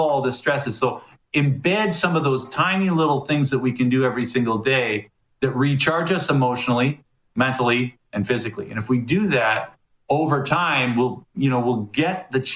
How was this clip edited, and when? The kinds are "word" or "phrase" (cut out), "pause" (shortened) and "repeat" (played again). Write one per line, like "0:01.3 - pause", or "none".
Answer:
none

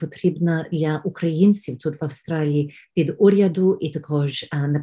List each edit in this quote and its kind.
none

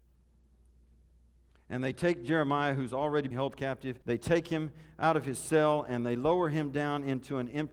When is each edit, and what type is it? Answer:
0:03.3 - word
0:04.0 - pause

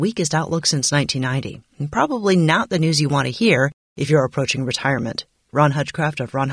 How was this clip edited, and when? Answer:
none

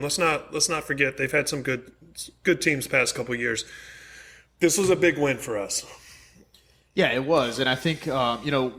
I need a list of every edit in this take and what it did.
none

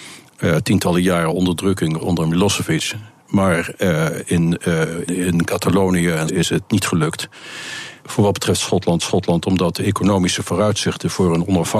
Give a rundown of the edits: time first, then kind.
0:02.0 - word
0:04.2 - word
0:05.1 - word
0:06.3 - phrase
0:08.0 - pause
0:09.0 - repeat

